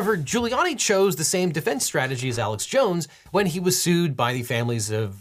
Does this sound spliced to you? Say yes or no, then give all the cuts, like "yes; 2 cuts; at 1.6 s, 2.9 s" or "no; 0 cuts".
no; 0 cuts